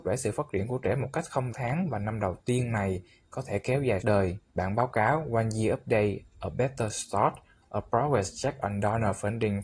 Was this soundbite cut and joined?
yes; 3 cuts; at 1.5 s, 4.0 s, 4.5 s

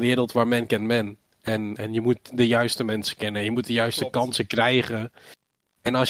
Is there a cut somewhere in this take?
no; 0 cuts

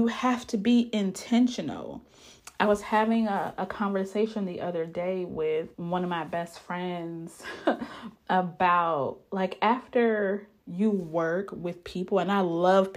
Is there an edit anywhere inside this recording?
yes; 1 cut; at 5.7 s

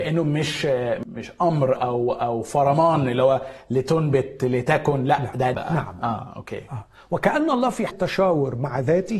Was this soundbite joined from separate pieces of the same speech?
yes; 3 cuts; at 1.8 s, 5.5 s, 7.9 s

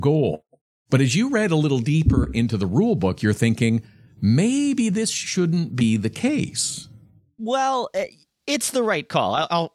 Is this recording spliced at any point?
no; 0 cuts

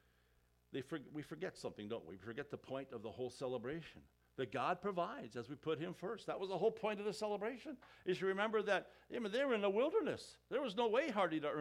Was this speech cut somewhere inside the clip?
no; 0 cuts

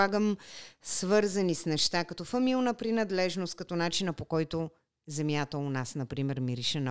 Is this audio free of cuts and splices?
yes; 0 cuts

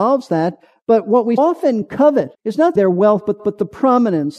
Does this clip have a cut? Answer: yes; 4 cuts; at 1.4 s, 2.3 s, 2.8 s, 3.4 s

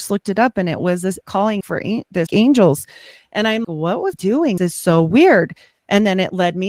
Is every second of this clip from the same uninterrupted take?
no; 6 cuts; at 1.2 s, 1.6 s, 2.3 s, 3.6 s, 4.1 s, 4.6 s

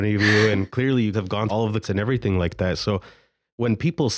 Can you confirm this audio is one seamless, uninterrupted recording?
no; 3 cuts; at 1.1 s, 1.5 s, 1.8 s

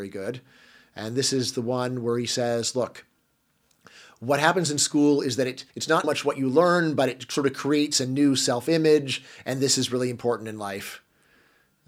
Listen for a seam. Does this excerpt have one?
yes; 2 cuts; at 5.7 s, 6.0 s

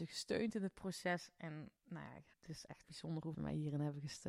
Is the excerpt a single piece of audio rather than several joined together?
no; 4 cuts; at 1.8 s, 2.3 s, 2.8 s, 3.3 s

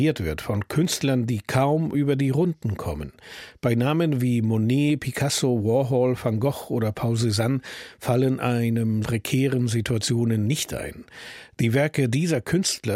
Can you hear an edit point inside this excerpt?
yes; 1 cut; at 9.0 s

